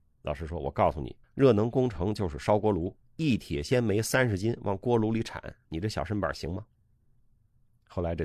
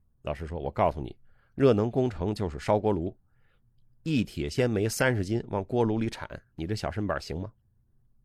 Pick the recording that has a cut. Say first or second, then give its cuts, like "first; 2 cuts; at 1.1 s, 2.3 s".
first; 2 cuts; at 1.2 s, 3.0 s